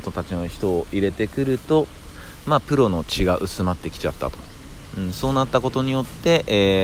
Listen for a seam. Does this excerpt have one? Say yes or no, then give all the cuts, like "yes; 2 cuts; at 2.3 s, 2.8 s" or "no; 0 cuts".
no; 0 cuts